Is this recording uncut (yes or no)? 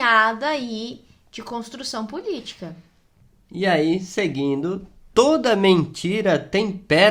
yes